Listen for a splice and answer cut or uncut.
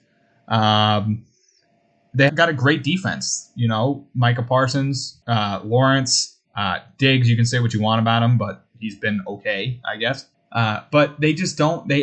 cut